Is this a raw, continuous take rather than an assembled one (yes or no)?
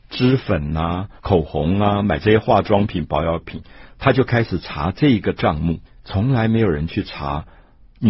no